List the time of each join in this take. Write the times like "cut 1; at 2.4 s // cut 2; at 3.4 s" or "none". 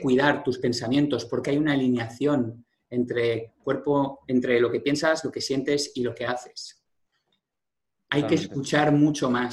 cut 1; at 1.4 s